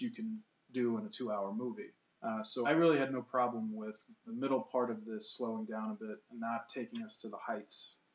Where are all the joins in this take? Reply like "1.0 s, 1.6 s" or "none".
2.1 s, 2.6 s, 4.3 s